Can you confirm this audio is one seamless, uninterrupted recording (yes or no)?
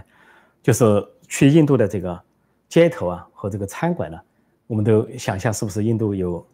yes